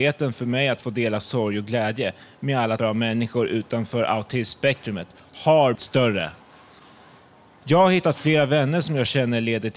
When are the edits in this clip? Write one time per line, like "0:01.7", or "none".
0:02.8
0:05.8

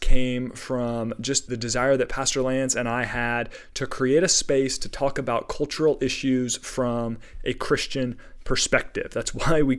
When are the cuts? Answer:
0:01.5

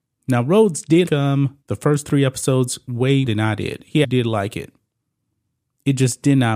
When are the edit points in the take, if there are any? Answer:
0:01.1
0:01.6
0:03.3
0:04.0

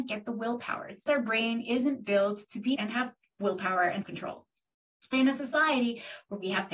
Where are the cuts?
0:01.1
0:02.8
0:04.0
0:05.1

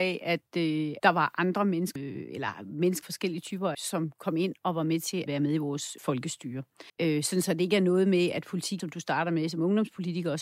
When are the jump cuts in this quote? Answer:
0:01.0
0:02.0
0:03.0
0:03.7
0:05.3
0:06.0
0:06.9
0:08.8

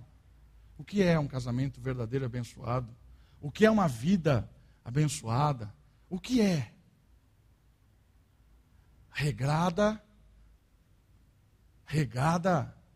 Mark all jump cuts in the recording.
none

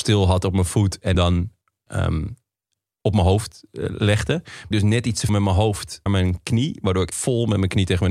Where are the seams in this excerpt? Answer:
0:01.1
0:01.9
0:04.7
0:05.3
0:06.1
0:07.1

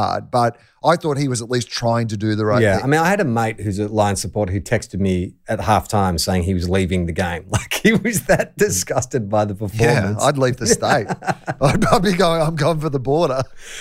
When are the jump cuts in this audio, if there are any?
none

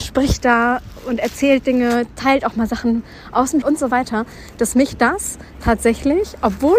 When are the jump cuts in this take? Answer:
0:03.6

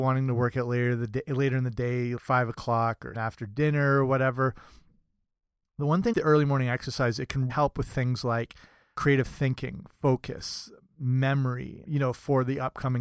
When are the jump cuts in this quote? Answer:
0:02.2
0:03.1
0:06.1
0:07.5
0:08.9
0:11.8

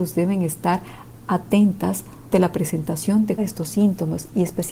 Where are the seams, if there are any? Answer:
0:02.3
0:03.4

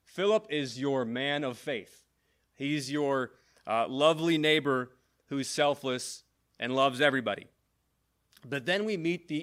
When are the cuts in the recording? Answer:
none

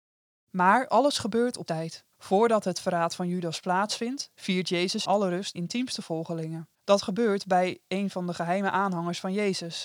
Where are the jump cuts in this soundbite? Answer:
0:01.7
0:02.1
0:05.0
0:05.5
0:06.7

